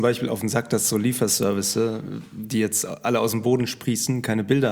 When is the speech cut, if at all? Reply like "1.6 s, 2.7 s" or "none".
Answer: none